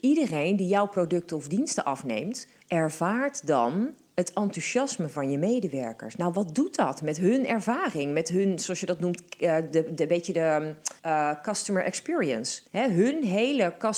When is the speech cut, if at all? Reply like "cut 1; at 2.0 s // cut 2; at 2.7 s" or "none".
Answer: cut 1; at 2.6 s // cut 2; at 11.0 s // cut 3; at 12.7 s